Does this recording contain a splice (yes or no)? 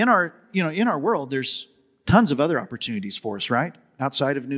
no